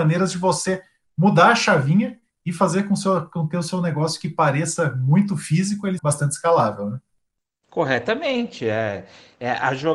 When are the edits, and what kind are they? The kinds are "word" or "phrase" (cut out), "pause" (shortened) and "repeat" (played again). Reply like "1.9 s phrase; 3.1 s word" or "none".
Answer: 6.0 s word